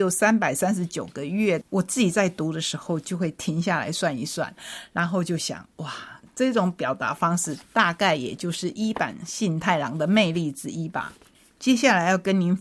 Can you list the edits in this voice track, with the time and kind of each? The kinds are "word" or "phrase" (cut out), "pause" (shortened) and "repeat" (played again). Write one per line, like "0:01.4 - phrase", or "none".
none